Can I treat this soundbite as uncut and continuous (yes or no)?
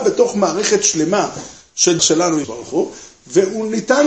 no